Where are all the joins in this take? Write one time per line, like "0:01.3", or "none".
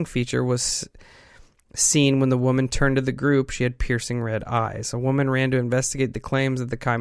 none